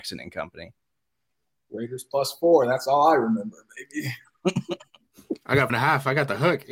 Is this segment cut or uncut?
cut